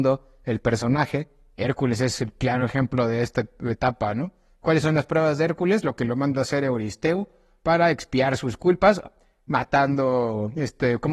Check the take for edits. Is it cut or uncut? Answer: uncut